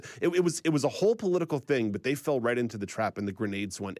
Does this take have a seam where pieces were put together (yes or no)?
no